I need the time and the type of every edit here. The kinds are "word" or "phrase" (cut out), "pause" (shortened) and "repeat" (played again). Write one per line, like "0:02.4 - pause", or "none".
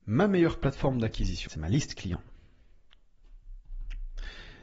0:01.5 - phrase